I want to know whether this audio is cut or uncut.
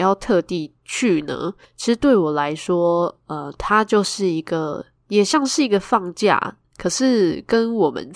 uncut